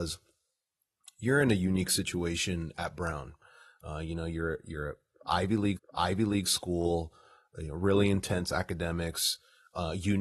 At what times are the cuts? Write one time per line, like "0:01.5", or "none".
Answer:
0:05.8